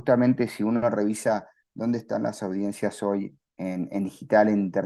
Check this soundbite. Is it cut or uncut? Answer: cut